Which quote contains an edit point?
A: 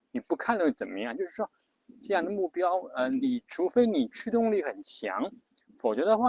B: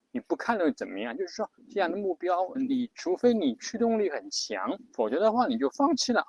B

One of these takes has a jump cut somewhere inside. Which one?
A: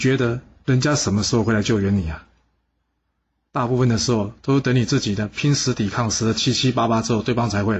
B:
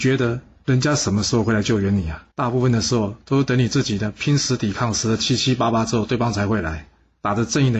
B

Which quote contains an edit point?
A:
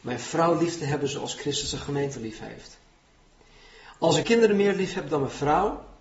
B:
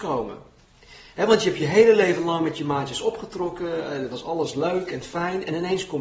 A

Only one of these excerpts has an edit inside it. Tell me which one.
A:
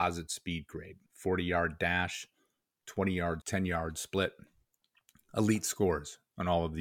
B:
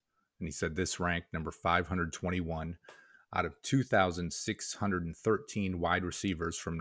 A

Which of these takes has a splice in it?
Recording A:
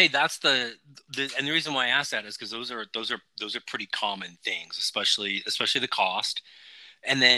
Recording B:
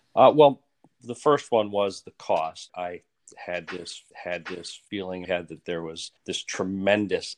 B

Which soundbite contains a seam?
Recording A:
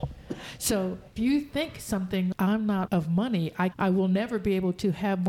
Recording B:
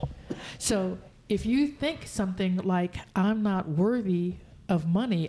A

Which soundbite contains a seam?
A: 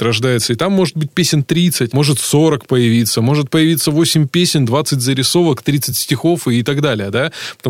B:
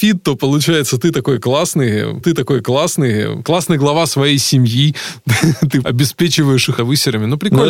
B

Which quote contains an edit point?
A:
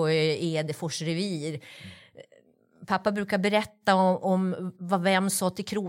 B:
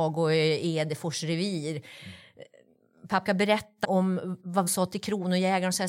B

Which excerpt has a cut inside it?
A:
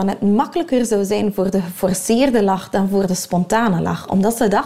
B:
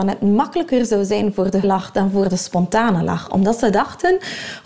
B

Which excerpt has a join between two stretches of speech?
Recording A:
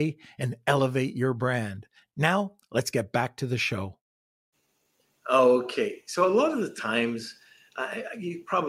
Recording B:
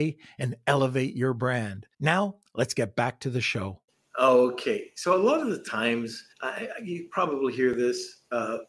B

